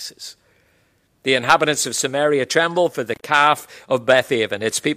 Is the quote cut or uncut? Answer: uncut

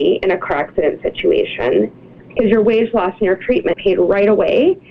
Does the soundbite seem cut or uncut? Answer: cut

